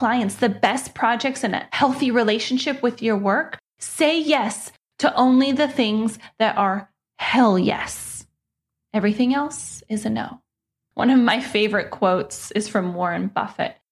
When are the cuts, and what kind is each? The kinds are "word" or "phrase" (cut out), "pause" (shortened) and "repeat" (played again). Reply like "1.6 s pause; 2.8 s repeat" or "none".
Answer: none